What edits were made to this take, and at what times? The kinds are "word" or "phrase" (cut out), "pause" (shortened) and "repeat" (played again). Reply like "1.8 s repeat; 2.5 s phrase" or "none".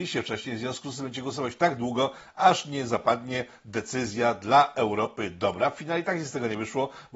none